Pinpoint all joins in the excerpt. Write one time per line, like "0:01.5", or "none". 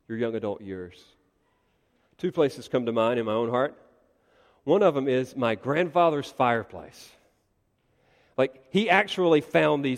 none